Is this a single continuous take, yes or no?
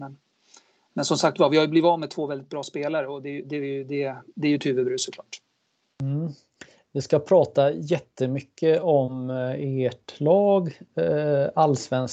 yes